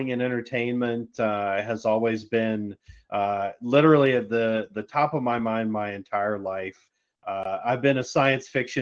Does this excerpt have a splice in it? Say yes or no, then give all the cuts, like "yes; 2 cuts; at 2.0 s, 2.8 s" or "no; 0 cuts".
no; 0 cuts